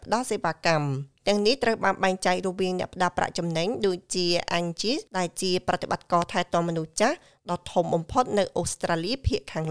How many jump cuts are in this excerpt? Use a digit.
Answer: 1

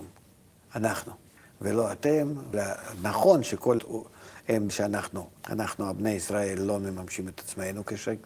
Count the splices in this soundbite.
5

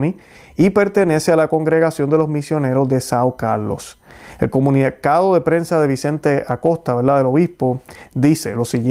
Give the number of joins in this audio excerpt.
0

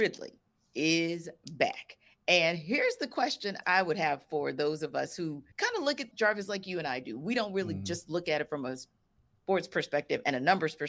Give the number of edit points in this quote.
3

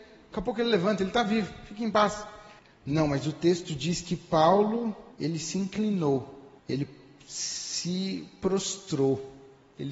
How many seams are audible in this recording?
3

